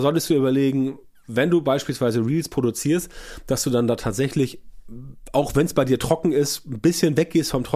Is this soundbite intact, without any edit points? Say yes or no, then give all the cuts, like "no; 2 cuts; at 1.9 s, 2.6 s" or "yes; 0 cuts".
yes; 0 cuts